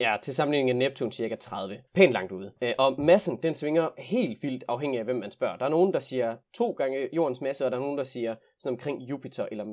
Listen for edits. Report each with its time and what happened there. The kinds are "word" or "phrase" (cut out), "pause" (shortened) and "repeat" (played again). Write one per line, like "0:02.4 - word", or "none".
0:01.9 - pause
0:02.6 - pause
0:06.4 - pause